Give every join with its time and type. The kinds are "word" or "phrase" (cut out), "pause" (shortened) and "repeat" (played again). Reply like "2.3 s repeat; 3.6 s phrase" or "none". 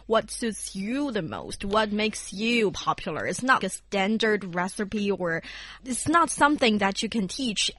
3.6 s word

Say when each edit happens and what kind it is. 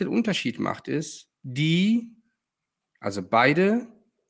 1.3 s pause

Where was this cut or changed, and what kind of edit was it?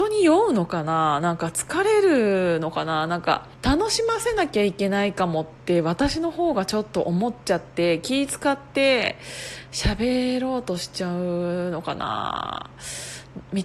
3.5 s pause

